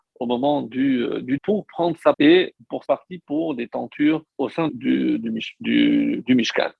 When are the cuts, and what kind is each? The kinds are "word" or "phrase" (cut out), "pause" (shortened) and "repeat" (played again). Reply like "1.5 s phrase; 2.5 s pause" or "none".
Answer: 1.4 s word; 2.1 s word; 2.9 s word; 4.4 s word; 4.7 s word